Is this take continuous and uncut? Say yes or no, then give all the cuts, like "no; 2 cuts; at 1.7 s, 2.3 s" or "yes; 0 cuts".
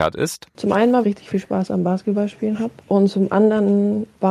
no; 1 cut; at 1.0 s